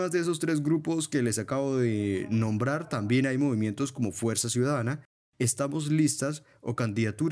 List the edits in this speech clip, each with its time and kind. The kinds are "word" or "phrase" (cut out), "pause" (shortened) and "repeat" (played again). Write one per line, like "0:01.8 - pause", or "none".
none